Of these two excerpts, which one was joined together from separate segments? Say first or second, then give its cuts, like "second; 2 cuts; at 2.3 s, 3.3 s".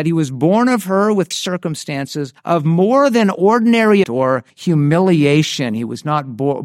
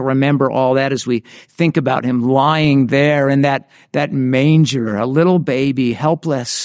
first; 4 cuts; at 1.3 s, 2.4 s, 4.0 s, 4.5 s